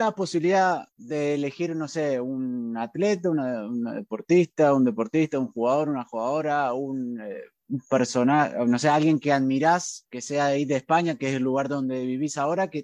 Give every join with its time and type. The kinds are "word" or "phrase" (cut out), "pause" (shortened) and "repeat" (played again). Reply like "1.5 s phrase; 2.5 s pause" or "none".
0.9 s pause